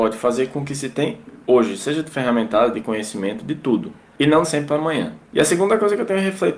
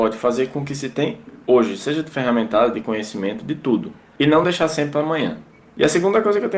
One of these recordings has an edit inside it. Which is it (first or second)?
first